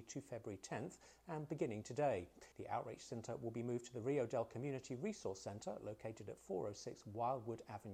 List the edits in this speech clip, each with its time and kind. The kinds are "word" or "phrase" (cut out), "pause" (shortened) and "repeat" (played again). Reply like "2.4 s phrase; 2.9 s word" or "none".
2.5 s pause